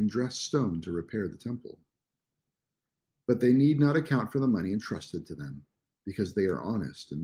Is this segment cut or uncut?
uncut